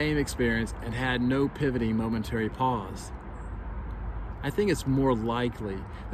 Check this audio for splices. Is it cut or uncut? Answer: uncut